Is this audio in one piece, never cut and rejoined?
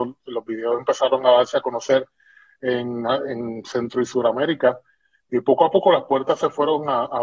yes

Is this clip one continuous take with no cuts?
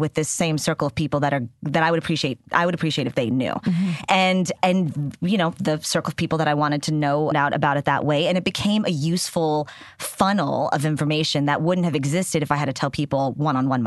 no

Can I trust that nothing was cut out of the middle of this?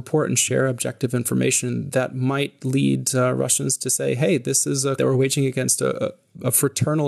no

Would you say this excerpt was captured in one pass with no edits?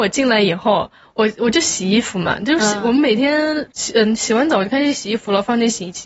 yes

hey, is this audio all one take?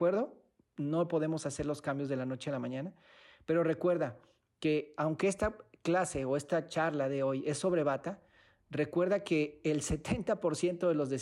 yes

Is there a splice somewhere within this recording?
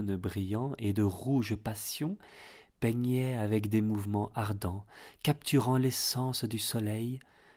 no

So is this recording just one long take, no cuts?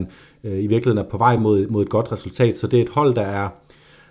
yes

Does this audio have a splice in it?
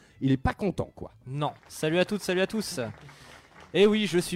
yes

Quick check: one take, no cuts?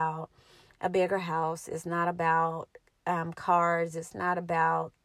yes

